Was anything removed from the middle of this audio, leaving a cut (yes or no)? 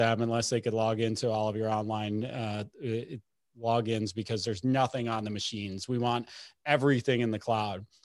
no